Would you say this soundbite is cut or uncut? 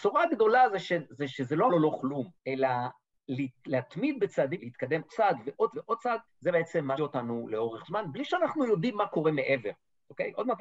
cut